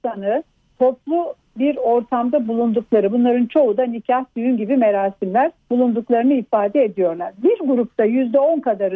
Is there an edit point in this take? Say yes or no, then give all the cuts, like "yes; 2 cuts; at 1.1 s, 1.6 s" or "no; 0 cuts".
yes; 1 cut; at 5.6 s